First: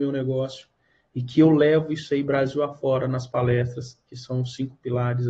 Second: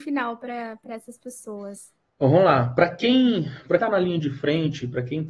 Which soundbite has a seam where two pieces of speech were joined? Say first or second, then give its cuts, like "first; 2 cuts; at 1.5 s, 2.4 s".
second; 2 cuts; at 2.0 s, 3.8 s